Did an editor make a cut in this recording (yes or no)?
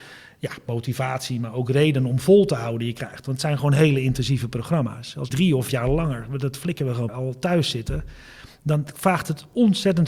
yes